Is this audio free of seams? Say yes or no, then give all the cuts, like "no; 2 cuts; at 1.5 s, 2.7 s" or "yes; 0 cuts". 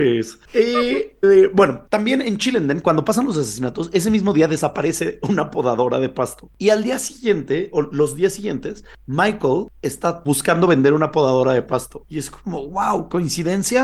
no; 1 cut; at 1.2 s